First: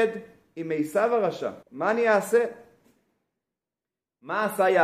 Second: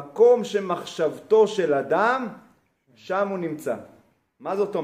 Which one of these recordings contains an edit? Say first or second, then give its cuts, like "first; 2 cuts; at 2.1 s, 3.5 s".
first; 1 cut; at 1.6 s